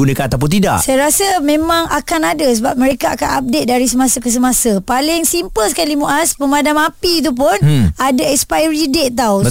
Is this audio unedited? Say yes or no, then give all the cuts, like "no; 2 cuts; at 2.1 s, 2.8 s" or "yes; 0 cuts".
yes; 0 cuts